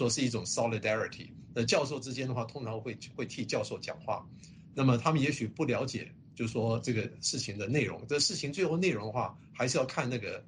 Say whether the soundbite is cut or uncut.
uncut